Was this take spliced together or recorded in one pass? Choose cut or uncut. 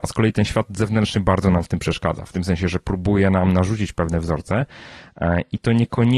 uncut